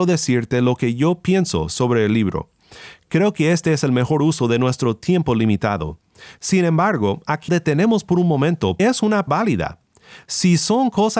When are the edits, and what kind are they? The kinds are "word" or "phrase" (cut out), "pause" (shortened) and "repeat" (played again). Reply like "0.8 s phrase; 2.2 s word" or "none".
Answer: 7.5 s word; 8.8 s word; 9.3 s word